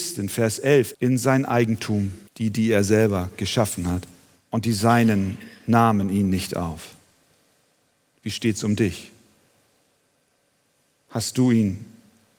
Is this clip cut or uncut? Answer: cut